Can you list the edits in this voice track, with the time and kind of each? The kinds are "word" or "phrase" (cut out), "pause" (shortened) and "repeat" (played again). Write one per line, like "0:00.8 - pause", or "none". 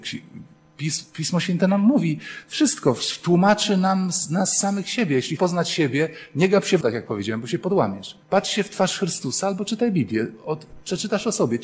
0:05.4 - word
0:06.8 - word
0:08.2 - pause